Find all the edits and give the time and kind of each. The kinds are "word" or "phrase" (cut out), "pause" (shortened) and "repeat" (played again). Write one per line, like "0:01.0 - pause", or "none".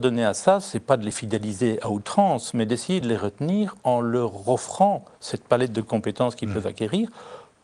none